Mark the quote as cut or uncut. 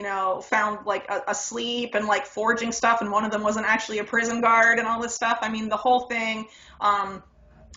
uncut